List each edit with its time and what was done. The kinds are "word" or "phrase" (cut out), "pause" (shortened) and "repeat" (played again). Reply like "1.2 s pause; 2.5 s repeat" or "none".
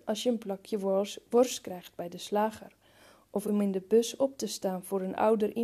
none